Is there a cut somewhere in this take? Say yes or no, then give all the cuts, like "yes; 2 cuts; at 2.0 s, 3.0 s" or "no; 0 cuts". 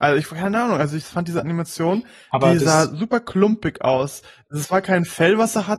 no; 0 cuts